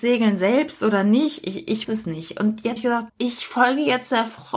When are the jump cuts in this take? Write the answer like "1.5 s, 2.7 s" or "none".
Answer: 1.8 s, 2.8 s, 3.1 s